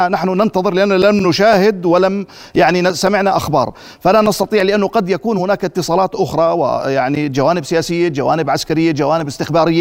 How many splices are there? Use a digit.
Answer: 0